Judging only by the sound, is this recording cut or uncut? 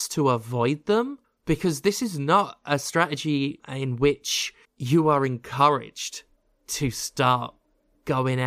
cut